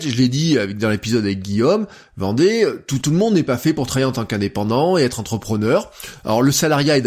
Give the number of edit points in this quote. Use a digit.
1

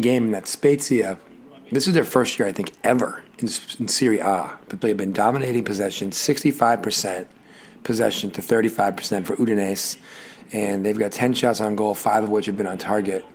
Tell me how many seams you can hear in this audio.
1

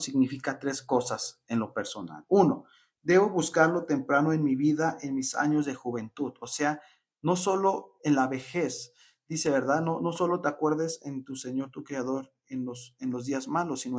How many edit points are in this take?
0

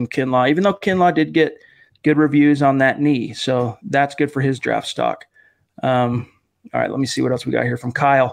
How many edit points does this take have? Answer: 0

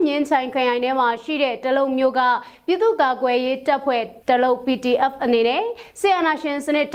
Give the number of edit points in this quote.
1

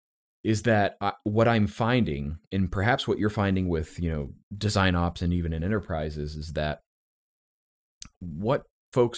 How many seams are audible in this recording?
1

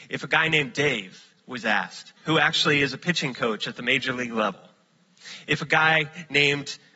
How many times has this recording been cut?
1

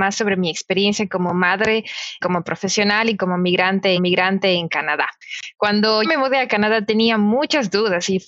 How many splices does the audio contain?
3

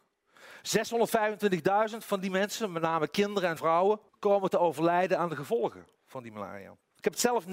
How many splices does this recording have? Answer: 2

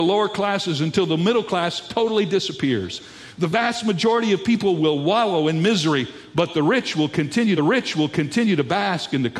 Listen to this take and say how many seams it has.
1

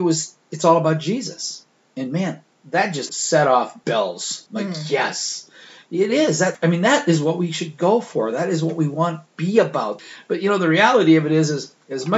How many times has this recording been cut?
2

